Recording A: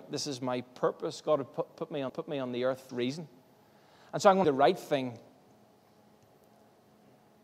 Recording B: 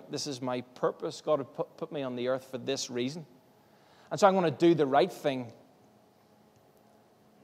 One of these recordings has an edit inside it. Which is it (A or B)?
A